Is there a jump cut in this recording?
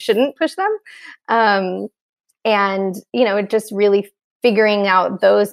no; 0 cuts

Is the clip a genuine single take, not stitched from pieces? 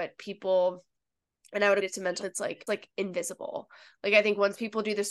no; 3 cuts; at 1.8 s, 2.2 s, 2.7 s

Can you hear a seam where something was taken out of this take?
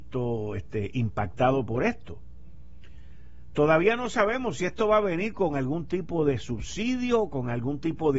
no; 0 cuts

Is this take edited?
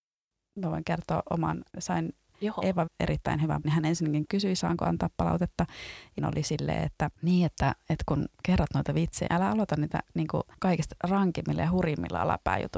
yes; 6 cuts; at 1.7 s, 2.9 s, 3.6 s, 6.2 s, 7.2 s, 9.3 s

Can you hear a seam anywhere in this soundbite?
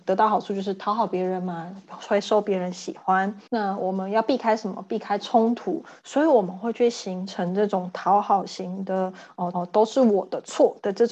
yes; 2 cuts; at 3.5 s, 9.5 s

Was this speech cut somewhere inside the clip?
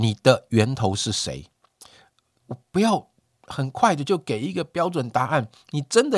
no; 0 cuts

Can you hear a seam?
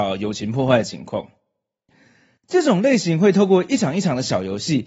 no; 0 cuts

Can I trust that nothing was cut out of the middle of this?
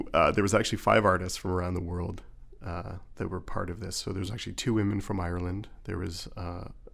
yes; 0 cuts

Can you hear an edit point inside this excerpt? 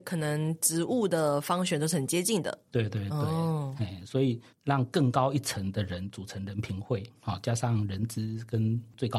no; 0 cuts

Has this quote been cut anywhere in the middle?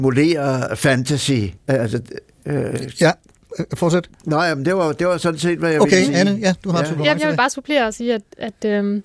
yes; 2 cuts; at 1.6 s, 4.1 s

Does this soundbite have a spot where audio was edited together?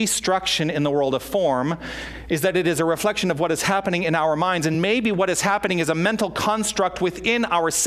no; 0 cuts

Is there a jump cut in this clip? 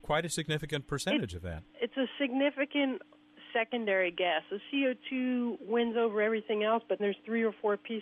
yes; 2 cuts; at 1.7 s, 7.0 s

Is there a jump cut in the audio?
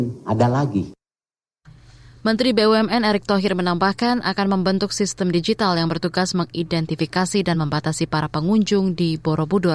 no; 0 cuts

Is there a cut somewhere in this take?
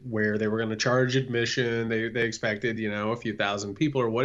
no; 0 cuts

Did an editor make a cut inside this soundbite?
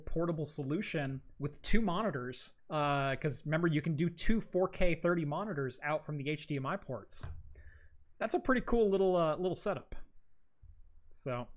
yes; 1 cut; at 2.6 s

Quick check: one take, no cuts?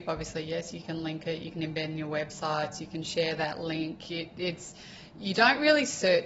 yes; 0 cuts

